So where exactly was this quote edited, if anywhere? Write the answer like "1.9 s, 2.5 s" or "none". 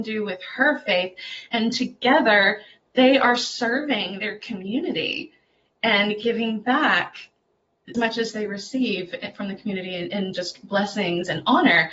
7.9 s

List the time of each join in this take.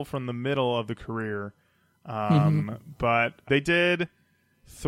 3.5 s

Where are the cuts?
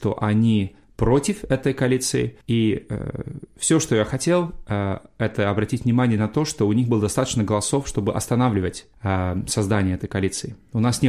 2.4 s

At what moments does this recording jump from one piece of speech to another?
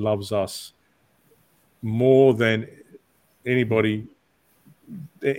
none

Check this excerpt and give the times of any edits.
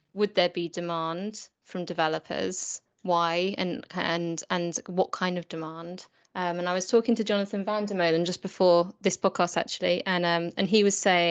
6.2 s

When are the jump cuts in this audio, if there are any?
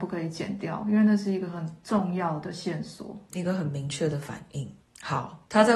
3.3 s

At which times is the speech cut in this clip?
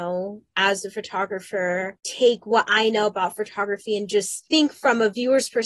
none

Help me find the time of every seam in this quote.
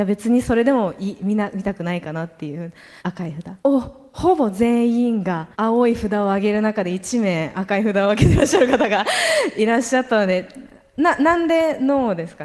3.0 s, 3.6 s, 5.5 s

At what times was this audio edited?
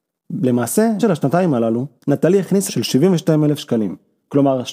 1.0 s, 2.0 s, 2.7 s

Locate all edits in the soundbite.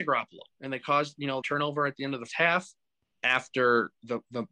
1.4 s, 2.3 s, 3.1 s

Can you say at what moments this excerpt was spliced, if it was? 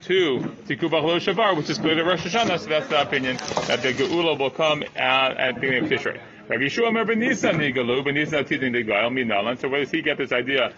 5.6 s

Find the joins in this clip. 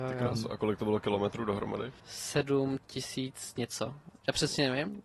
2.0 s

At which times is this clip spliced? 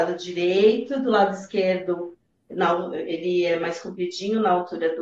none

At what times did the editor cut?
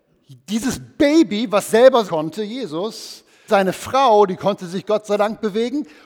2.0 s, 3.5 s

